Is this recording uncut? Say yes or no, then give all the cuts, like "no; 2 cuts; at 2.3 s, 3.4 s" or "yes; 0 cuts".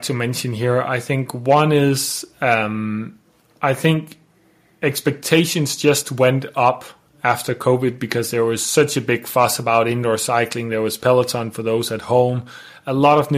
yes; 0 cuts